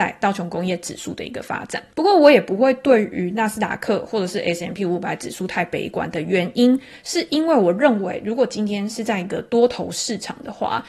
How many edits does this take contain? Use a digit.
1